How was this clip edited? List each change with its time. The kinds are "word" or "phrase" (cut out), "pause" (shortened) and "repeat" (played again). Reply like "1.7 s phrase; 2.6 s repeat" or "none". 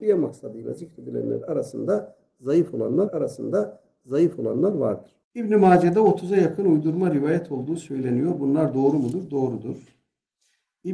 3.1 s repeat